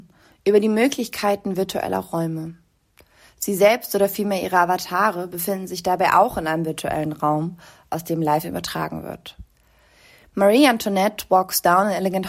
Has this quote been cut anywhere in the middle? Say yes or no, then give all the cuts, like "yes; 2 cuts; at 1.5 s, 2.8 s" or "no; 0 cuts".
no; 0 cuts